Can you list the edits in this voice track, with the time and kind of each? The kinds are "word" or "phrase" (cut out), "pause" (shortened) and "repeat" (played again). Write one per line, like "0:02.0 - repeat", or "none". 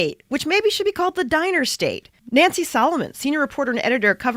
0:02.2 - pause